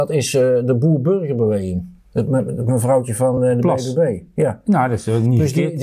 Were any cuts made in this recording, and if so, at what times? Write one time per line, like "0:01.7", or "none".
none

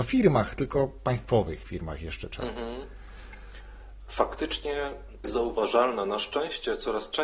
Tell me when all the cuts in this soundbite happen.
0:02.3
0:05.2

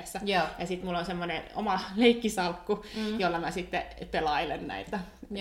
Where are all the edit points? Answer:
none

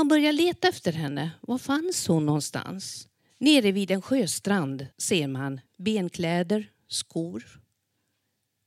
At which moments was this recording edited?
0:03.2
0:04.9
0:05.7

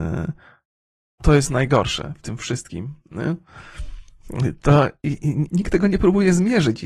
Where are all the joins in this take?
0:05.5

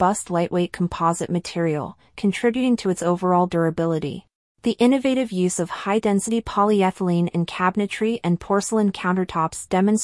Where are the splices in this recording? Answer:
0:04.4

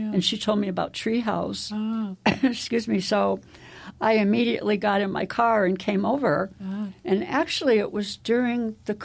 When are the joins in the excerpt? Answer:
none

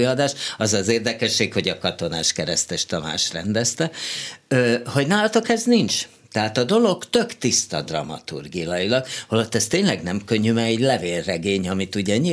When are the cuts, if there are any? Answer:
none

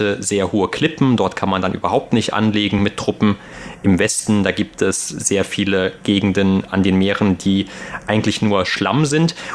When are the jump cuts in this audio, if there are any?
none

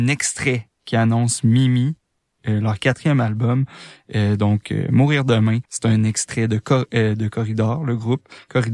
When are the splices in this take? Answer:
0:05.6

